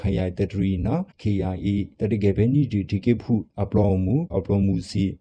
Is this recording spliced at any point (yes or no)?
yes